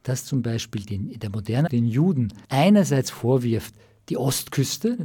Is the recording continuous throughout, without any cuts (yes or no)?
no